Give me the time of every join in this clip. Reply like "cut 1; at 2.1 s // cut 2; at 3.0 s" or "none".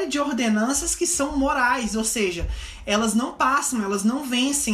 none